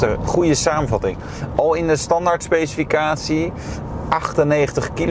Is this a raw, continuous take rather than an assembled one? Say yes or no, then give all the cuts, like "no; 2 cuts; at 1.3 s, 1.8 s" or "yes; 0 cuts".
yes; 0 cuts